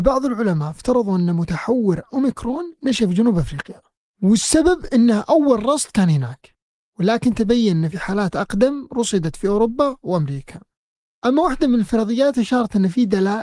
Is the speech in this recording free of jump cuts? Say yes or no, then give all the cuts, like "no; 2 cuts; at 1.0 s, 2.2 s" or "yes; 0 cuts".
yes; 0 cuts